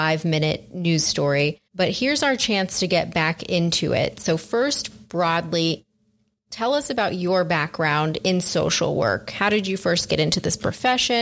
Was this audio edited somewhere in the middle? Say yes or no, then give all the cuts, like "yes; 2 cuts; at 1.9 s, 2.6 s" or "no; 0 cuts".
yes; 1 cut; at 1.7 s